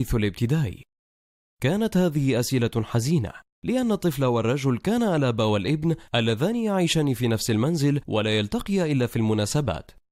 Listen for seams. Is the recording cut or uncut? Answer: uncut